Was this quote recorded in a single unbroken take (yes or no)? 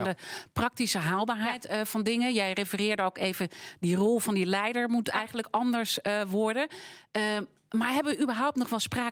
yes